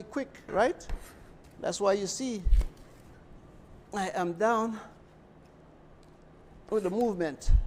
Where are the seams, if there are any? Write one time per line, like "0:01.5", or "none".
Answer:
none

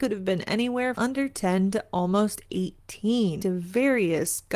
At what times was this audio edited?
0:00.9
0:03.4

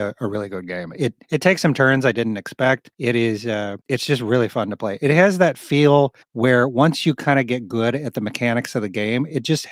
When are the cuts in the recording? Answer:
0:01.2
0:02.9
0:03.8
0:06.2

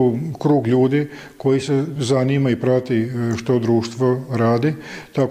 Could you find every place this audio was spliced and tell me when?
none

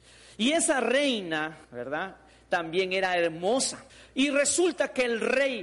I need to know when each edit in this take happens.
0:01.6
0:03.9

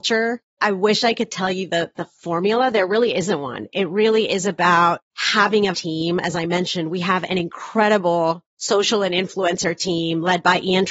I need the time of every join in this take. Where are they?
0:05.7

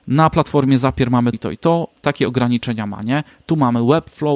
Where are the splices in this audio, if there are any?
0:01.3
0:02.0

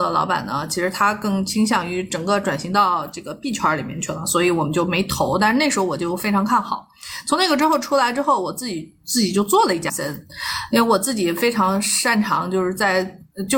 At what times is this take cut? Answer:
0:09.9

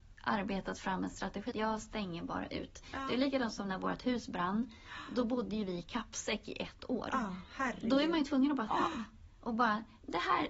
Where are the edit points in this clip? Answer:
0:01.5
0:08.7

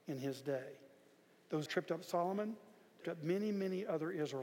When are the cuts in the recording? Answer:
0:01.7
0:03.0

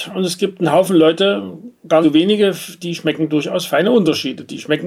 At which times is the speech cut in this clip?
0:02.0

